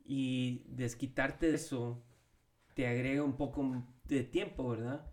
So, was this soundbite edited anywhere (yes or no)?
yes